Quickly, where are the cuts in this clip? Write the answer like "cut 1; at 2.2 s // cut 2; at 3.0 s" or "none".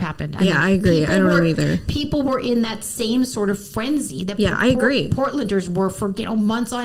none